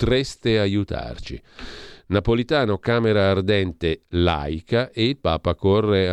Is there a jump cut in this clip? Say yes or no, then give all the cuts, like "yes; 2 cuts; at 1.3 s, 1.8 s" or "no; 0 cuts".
no; 0 cuts